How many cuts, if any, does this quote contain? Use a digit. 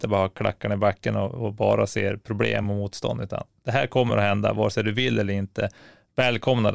0